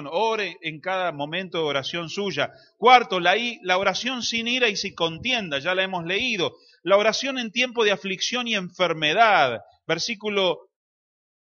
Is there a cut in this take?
no; 0 cuts

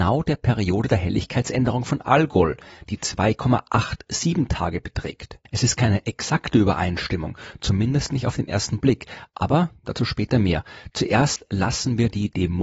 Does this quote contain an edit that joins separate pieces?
no; 0 cuts

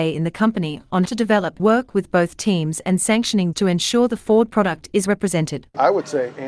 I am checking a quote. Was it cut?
yes; 4 cuts; at 1.1 s, 1.6 s, 3.5 s, 5.1 s

